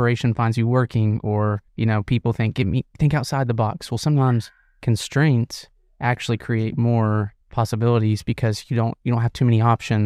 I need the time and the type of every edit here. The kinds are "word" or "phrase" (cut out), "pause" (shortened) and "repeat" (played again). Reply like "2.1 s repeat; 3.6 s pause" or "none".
1.7 s pause; 2.9 s pause; 7.4 s pause